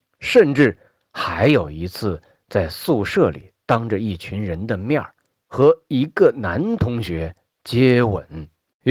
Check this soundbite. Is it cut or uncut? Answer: uncut